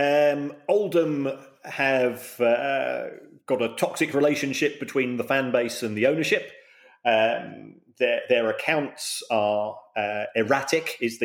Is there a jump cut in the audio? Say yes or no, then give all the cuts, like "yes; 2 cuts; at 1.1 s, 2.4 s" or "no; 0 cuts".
no; 0 cuts